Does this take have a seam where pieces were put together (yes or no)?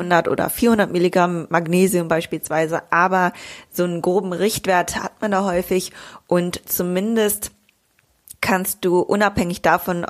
no